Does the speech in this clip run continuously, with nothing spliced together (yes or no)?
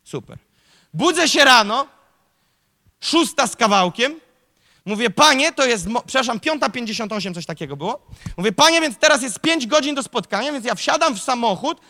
yes